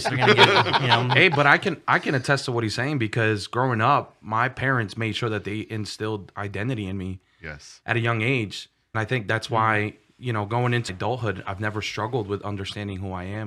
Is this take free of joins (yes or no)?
no